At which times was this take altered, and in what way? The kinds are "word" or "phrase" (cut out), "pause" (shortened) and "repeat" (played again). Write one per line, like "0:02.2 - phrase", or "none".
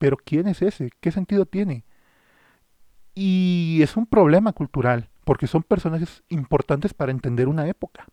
none